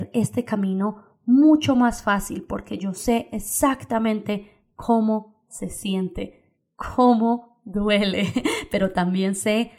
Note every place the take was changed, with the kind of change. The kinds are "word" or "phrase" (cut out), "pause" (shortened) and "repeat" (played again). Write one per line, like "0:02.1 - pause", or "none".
none